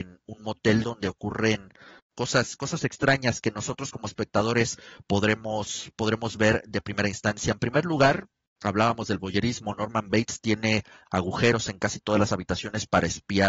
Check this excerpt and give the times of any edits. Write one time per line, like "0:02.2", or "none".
none

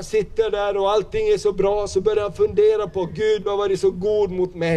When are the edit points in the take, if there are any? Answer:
none

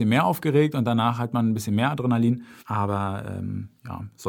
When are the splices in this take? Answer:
0:02.6

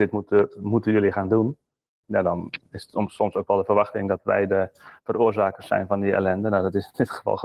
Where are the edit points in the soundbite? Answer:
none

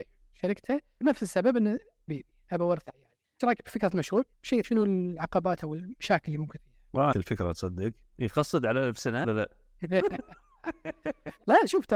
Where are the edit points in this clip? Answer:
0:01.0
0:02.1
0:03.4
0:04.6
0:06.6
0:07.1
0:09.2

